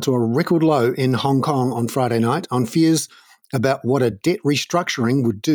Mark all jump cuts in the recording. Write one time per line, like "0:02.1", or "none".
none